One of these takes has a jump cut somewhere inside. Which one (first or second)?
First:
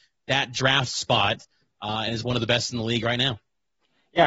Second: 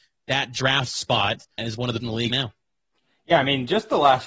second